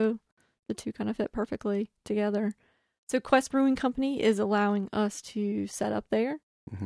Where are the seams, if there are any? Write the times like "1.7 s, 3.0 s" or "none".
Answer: none